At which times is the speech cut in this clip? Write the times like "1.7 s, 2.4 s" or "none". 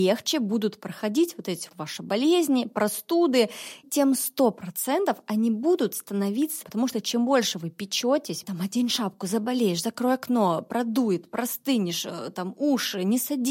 1.7 s, 3.8 s, 6.6 s, 8.4 s